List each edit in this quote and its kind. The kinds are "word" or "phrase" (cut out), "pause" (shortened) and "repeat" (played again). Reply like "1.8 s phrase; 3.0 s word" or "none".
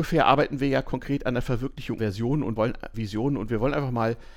2.0 s word; 2.6 s word; 2.9 s word